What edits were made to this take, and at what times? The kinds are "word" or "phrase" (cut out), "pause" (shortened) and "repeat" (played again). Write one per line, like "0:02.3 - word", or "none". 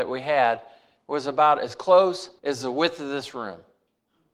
0:02.4 - pause